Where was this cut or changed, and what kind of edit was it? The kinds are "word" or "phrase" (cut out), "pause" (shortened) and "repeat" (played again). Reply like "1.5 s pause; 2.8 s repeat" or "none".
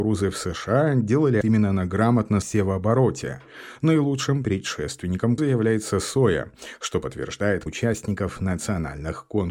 1.4 s word; 2.4 s word; 5.4 s word; 7.7 s word